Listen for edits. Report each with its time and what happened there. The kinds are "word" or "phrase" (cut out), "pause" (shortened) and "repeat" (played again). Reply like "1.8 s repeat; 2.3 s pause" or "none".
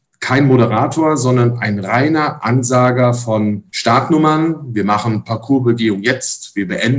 3.7 s pause